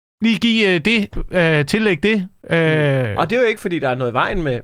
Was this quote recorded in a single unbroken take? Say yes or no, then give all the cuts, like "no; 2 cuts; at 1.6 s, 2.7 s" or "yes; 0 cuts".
yes; 0 cuts